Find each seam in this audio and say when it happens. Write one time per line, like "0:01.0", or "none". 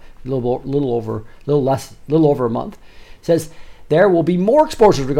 none